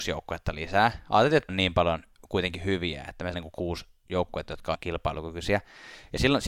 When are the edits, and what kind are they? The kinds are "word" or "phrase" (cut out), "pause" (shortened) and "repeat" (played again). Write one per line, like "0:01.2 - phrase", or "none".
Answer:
0:01.5 - word
0:03.3 - word
0:04.7 - word